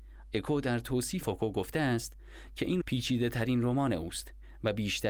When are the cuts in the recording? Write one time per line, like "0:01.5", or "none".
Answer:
0:01.2
0:02.8